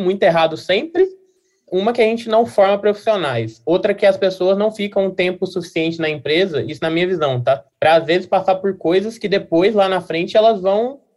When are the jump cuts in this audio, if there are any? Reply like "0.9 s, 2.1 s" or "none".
7.7 s